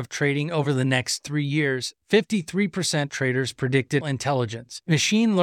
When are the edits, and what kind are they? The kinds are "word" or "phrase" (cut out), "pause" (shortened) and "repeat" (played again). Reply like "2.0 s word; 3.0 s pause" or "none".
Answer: 3.1 s word; 4.0 s word